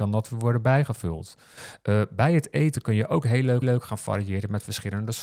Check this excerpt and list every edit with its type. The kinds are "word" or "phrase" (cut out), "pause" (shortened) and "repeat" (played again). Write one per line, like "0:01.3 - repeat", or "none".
0:03.6 - repeat